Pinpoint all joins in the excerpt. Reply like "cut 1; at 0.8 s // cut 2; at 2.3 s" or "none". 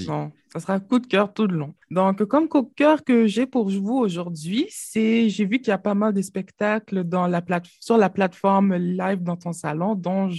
cut 1; at 1.8 s